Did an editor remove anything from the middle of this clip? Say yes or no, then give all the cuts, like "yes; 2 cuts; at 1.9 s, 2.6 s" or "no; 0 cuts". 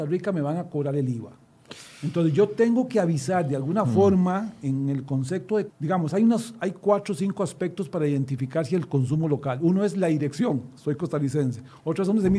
yes; 1 cut; at 5.7 s